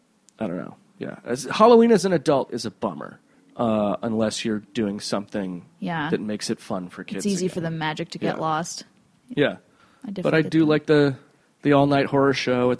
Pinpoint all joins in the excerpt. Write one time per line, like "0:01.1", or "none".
none